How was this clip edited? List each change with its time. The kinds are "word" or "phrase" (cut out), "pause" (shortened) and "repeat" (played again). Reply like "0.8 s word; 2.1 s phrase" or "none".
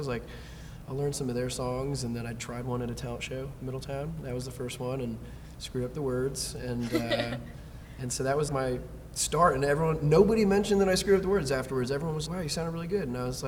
8.5 s word; 12.3 s word